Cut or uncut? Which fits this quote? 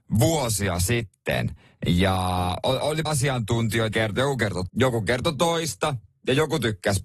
cut